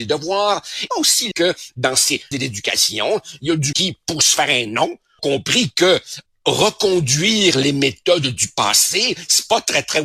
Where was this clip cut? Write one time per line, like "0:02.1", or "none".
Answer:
0:00.9
0:01.3
0:02.3
0:03.7
0:05.2
0:06.3